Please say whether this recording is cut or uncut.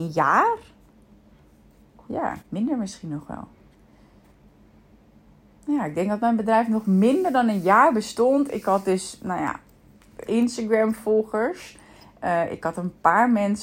cut